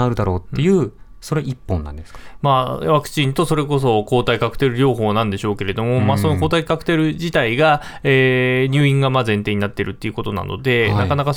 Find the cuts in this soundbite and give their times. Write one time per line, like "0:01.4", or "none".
none